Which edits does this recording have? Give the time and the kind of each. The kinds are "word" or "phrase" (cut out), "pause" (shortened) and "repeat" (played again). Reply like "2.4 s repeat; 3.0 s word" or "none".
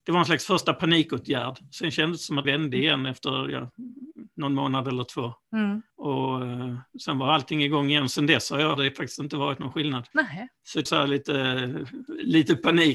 2.4 s word; 5.9 s pause; 8.8 s word; 10.1 s pause; 10.9 s phrase